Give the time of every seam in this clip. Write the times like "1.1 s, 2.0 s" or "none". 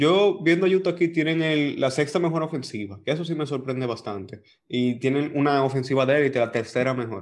none